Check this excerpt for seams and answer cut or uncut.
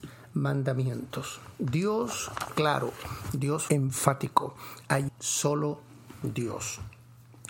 cut